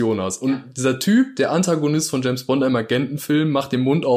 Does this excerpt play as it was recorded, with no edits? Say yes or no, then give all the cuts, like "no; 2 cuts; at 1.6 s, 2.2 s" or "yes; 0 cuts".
yes; 0 cuts